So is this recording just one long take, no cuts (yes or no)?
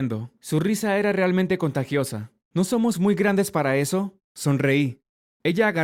yes